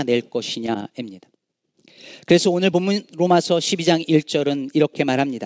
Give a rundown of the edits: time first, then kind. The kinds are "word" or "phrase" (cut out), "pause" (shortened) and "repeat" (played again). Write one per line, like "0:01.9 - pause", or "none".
none